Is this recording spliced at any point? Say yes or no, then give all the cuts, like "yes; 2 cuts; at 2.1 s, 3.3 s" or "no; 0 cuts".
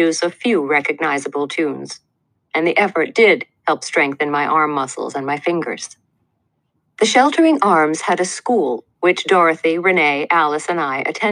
no; 0 cuts